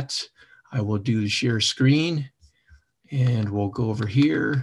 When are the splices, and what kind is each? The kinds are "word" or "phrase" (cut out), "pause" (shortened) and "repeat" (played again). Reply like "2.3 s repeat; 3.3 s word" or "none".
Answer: none